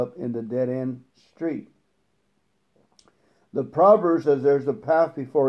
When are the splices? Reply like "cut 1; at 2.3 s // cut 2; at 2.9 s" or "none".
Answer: cut 1; at 1.1 s // cut 2; at 4.2 s